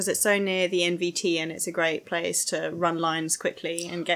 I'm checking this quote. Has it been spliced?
no; 0 cuts

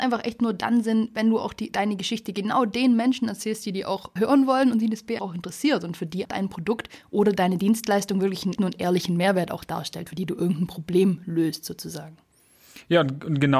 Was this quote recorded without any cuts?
no; 4 cuts; at 4.2 s, 5.2 s, 6.2 s, 8.6 s

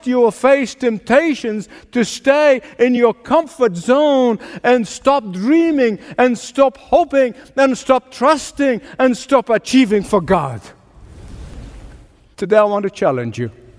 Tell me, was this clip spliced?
no; 0 cuts

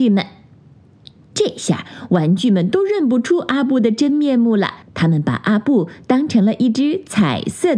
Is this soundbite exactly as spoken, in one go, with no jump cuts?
no; 1 cut; at 4.8 s

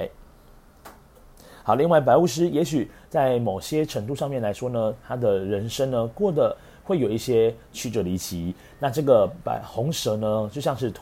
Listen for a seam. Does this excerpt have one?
no; 0 cuts

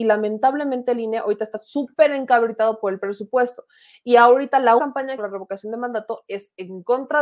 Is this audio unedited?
no; 2 cuts; at 4.8 s, 5.2 s

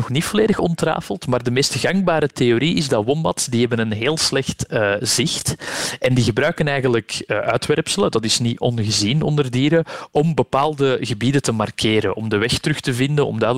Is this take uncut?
yes; 0 cuts

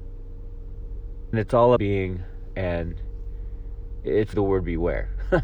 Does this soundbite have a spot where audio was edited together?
yes; 4 cuts; at 1.3 s, 1.8 s, 2.5 s, 4.3 s

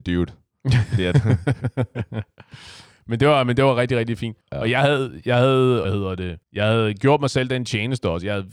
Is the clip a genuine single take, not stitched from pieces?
no; 3 cuts; at 4.4 s, 5.8 s, 6.4 s

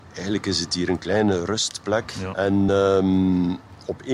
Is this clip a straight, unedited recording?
yes; 0 cuts

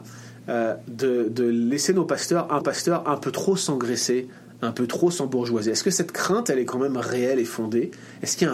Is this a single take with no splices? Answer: no; 1 cut; at 2.6 s

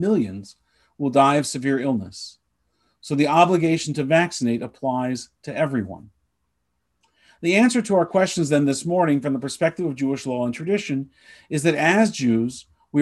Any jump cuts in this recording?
no; 0 cuts

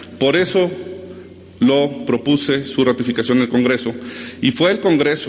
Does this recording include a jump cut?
no; 0 cuts

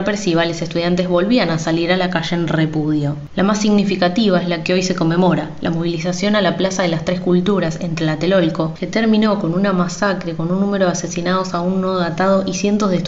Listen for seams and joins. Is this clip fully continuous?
yes; 0 cuts

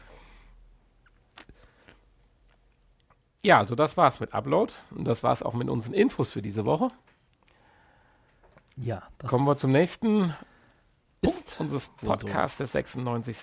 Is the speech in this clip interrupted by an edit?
no; 0 cuts

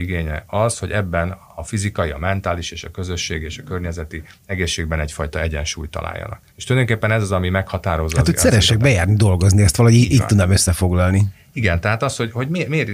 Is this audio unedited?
no; 1 cut; at 6.5 s

